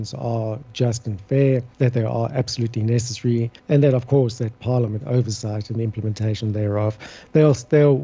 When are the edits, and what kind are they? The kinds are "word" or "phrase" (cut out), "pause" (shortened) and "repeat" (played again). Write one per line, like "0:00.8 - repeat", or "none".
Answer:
0:01.7 - pause
0:03.6 - pause
0:05.0 - word